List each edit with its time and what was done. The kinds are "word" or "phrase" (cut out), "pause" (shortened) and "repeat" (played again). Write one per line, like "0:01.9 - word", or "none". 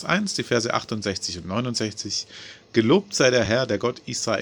none